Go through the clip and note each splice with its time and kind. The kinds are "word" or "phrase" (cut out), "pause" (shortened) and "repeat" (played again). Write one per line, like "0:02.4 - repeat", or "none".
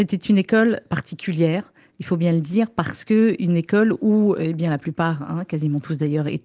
none